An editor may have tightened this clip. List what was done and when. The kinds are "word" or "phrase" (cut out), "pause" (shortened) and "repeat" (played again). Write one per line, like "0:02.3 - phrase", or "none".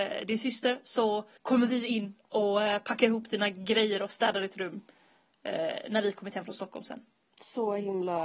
0:01.4 - pause